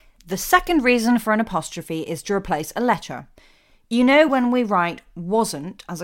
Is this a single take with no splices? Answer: yes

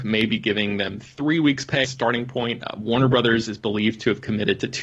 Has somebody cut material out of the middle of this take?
yes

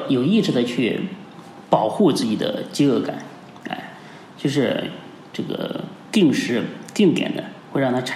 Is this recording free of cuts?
no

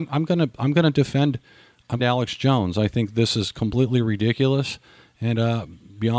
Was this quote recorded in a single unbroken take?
no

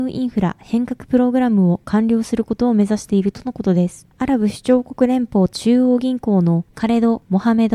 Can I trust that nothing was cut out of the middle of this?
yes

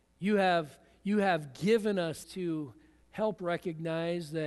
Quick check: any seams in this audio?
yes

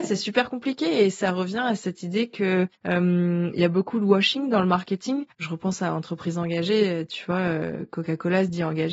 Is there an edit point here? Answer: yes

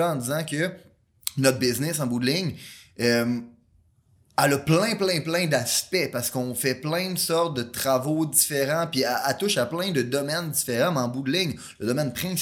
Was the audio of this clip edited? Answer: yes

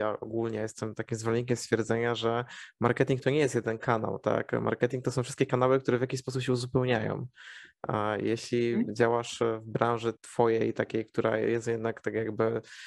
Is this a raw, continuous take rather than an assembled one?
no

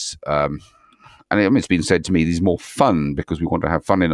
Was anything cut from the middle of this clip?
no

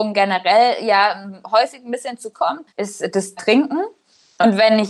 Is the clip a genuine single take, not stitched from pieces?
no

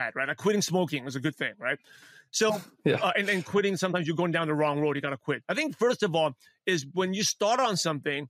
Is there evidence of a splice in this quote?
no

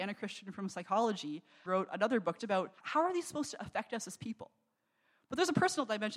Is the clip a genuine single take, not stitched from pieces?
no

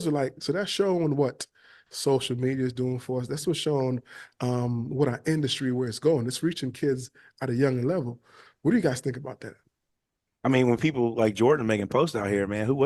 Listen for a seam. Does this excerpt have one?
no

